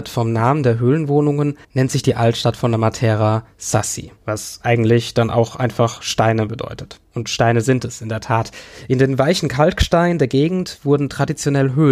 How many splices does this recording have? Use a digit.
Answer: 3